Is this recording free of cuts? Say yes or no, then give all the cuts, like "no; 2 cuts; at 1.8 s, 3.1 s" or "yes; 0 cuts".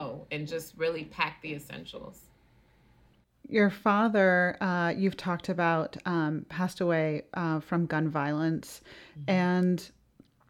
yes; 0 cuts